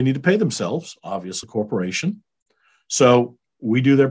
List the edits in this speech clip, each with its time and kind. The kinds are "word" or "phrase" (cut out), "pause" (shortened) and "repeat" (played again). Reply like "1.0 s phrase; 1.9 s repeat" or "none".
1.4 s word